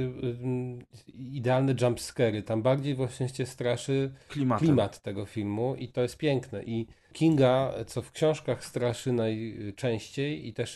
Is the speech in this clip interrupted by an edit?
yes; 1 cut; at 7.1 s

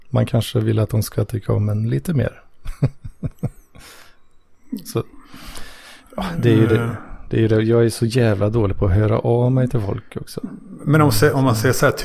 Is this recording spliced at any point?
no; 0 cuts

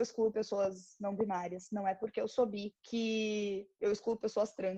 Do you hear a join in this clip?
yes; 1 cut; at 2.8 s

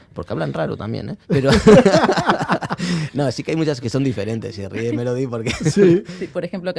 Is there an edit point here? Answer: yes; 2 cuts; at 1.2 s, 3.8 s

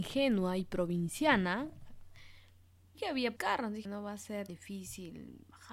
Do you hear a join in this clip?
yes; 4 cuts; at 2.9 s, 3.4 s, 3.8 s, 4.5 s

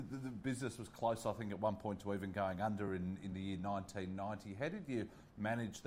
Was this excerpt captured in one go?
yes; 0 cuts

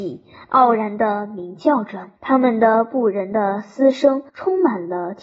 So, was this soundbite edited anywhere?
yes; 2 cuts; at 2.2 s, 4.3 s

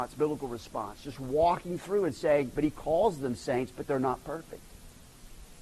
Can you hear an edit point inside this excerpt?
no; 0 cuts

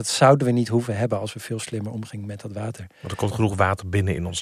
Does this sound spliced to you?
no; 0 cuts

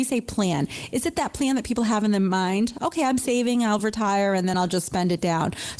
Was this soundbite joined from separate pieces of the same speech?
no; 0 cuts

